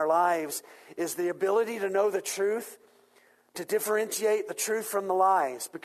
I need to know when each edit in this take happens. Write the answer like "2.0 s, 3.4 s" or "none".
none